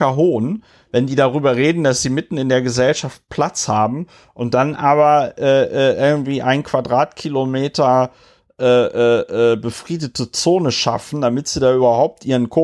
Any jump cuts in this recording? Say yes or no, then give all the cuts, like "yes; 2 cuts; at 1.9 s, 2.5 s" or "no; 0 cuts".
no; 0 cuts